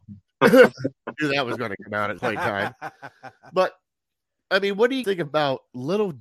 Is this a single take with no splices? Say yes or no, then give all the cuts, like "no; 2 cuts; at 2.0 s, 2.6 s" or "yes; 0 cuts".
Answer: no; 2 cuts; at 2.2 s, 5.0 s